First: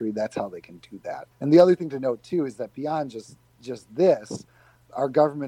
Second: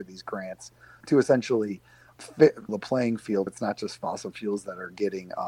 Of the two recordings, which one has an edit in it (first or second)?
second